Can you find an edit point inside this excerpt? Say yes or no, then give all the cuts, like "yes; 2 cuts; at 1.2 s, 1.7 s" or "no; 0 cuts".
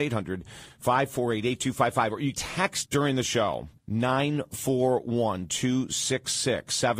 yes; 3 cuts; at 2.3 s, 2.9 s, 3.8 s